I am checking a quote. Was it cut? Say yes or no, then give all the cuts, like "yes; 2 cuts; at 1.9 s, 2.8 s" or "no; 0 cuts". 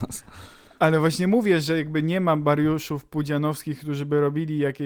no; 0 cuts